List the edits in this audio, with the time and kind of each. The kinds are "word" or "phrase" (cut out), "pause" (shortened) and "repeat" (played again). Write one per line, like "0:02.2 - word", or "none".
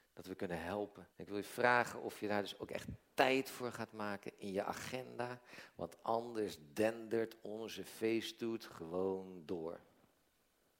0:01.1 - pause